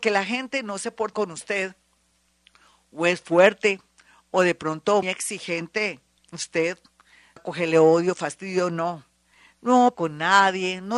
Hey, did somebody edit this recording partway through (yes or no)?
yes